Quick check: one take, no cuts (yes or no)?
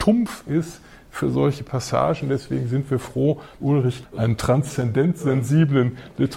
no